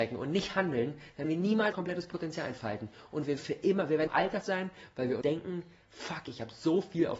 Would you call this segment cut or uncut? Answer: cut